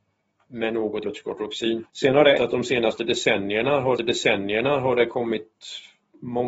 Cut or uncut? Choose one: cut